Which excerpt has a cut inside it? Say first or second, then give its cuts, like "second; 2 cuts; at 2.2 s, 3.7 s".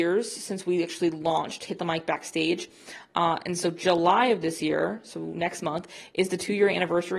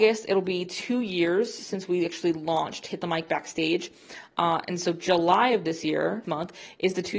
second; 1 cut; at 6.2 s